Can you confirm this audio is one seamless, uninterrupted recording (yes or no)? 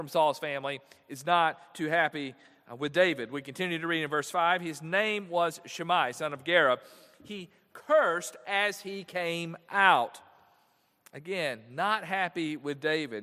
yes